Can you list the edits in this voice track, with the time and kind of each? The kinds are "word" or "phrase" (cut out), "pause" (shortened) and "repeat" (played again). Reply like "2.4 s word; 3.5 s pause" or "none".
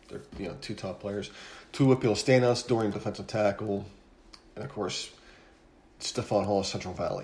2.9 s word